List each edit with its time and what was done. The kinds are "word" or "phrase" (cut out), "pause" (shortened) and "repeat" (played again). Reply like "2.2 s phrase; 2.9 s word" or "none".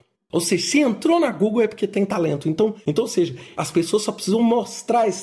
none